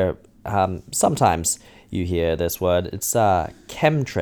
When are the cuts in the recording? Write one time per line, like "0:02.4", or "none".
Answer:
none